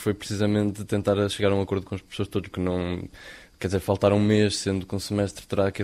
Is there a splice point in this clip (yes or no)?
yes